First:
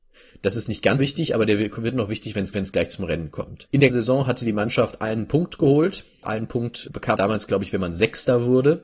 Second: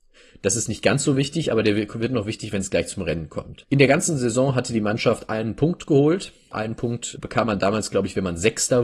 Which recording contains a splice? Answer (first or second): first